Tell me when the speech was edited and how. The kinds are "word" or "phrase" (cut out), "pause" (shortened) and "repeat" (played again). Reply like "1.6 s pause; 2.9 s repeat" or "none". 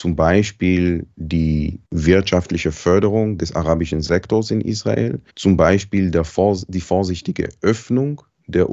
1.8 s pause; 5.3 s pause